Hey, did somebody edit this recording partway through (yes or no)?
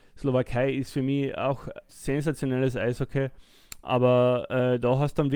yes